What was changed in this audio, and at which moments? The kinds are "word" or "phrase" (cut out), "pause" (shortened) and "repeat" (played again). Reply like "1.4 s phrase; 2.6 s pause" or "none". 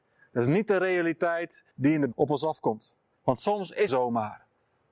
1.7 s pause; 2.1 s word; 3.1 s pause; 3.9 s phrase